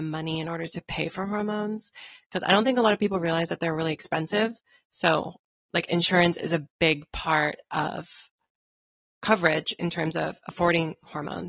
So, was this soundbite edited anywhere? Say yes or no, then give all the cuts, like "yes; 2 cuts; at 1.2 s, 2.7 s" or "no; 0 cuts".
no; 0 cuts